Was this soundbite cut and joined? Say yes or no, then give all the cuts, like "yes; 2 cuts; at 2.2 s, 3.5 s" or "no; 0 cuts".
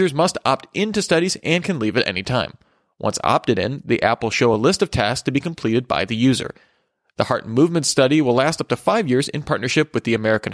no; 0 cuts